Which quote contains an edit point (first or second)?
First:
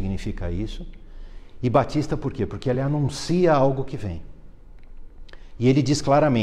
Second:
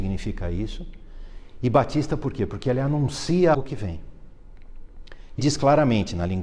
second